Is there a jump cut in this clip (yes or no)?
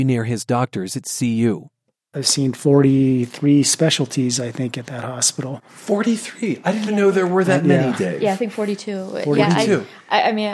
yes